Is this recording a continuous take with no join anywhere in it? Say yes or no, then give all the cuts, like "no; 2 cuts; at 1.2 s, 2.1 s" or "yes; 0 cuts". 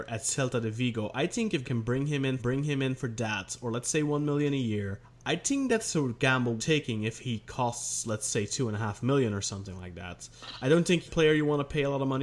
no; 5 cuts; at 1.6 s, 2.4 s, 5.0 s, 6.6 s, 11.1 s